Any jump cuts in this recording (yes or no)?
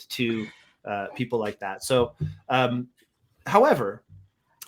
no